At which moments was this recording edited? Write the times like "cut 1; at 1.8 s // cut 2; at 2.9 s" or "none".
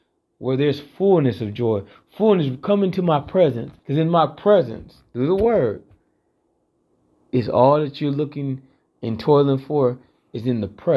cut 1; at 3.8 s